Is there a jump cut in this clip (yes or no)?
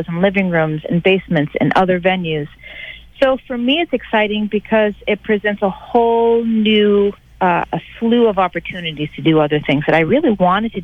yes